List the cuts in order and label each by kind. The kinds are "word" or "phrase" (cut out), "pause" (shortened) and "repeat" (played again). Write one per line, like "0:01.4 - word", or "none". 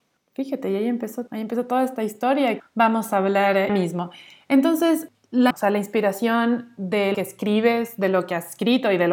0:01.3 - word
0:02.6 - word
0:03.7 - word
0:05.5 - word
0:07.1 - word